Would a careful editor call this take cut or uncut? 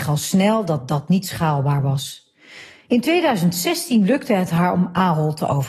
uncut